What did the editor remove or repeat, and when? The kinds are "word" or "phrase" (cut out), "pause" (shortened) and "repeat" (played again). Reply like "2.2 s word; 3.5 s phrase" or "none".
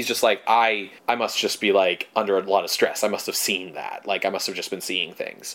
1.0 s pause